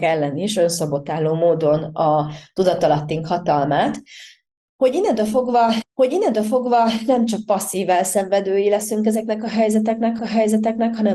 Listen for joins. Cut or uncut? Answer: cut